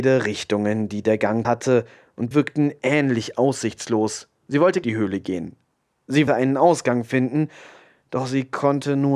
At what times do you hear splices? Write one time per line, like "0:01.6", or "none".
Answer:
0:01.4
0:02.3
0:04.4
0:04.8
0:06.3